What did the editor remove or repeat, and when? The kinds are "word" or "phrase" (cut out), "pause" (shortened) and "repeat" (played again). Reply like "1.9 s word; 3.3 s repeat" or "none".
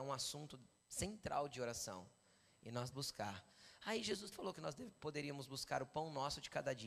2.9 s word; 4.3 s word